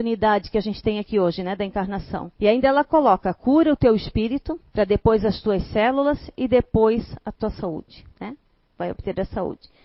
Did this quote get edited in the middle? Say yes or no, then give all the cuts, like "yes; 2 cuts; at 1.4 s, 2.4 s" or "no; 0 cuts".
yes; 3 cuts; at 2.4 s, 4.7 s, 8.1 s